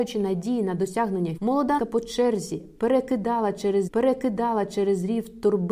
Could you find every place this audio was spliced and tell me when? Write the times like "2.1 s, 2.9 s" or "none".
1.4 s, 1.8 s, 3.9 s